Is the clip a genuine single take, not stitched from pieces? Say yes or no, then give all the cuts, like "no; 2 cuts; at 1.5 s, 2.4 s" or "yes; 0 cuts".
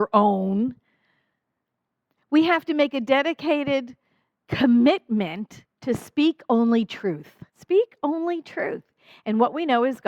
no; 2 cuts; at 5.7 s, 7.5 s